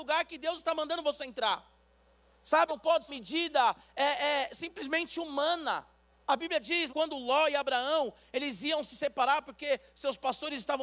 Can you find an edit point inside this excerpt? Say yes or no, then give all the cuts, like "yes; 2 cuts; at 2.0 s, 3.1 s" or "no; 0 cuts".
yes; 4 cuts; at 2.7 s, 3.1 s, 6.1 s, 6.9 s